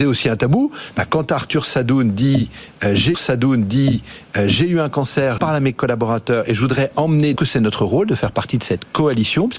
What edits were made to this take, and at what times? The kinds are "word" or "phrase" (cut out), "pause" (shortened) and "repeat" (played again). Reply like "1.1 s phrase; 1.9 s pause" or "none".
3.1 s repeat; 5.4 s word; 7.4 s phrase